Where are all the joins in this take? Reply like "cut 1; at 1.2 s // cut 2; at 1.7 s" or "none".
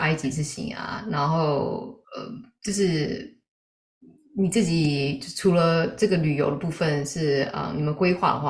cut 1; at 2.0 s